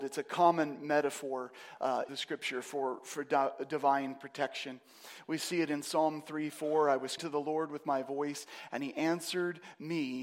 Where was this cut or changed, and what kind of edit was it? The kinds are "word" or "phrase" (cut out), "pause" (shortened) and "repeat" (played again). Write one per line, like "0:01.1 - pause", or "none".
0:02.1 - phrase
0:07.2 - word